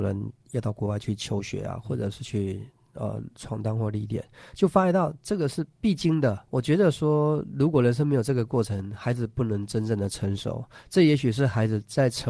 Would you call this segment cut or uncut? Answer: cut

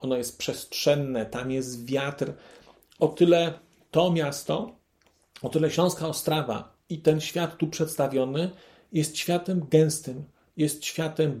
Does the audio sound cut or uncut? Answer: uncut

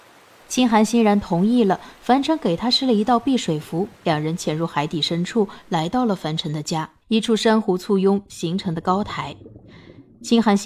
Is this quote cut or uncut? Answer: cut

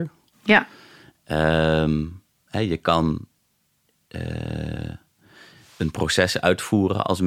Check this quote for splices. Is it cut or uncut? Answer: uncut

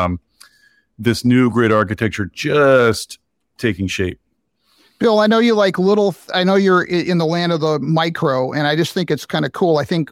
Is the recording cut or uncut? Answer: uncut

